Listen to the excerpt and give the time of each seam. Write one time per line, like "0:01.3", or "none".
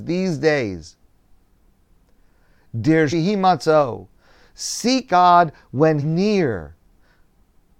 0:03.1
0:05.1
0:06.0